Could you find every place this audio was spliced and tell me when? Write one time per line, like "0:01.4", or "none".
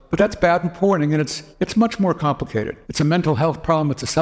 0:01.5
0:02.8